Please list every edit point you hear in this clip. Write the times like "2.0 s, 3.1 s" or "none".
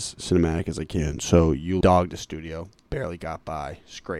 1.8 s